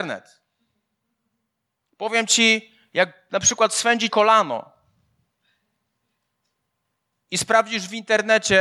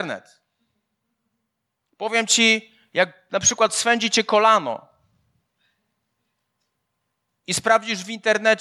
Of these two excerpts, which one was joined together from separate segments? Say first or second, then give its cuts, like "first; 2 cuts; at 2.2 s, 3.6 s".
first; 1 cut; at 4.1 s